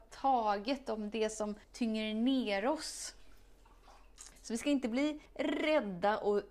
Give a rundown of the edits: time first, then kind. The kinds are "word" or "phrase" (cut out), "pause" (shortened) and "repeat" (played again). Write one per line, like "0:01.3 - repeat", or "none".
0:01.6 - pause
0:04.3 - pause
0:05.3 - pause